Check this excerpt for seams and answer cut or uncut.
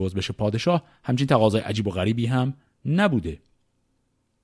uncut